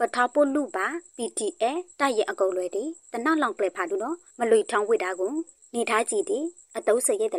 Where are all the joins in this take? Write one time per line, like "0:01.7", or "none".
none